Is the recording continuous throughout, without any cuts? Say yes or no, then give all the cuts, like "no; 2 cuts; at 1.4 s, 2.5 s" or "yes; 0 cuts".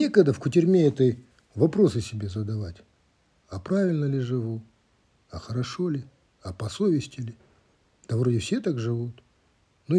yes; 0 cuts